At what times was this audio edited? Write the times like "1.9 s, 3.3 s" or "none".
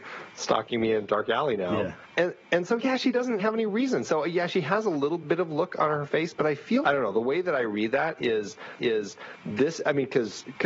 3.4 s, 5.2 s, 6.8 s, 8.8 s